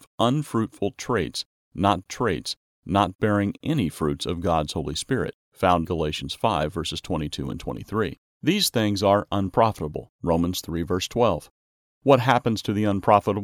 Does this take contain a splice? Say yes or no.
yes